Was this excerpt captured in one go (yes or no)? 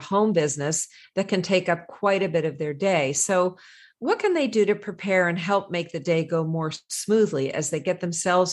yes